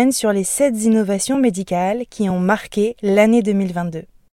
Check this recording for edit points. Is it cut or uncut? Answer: uncut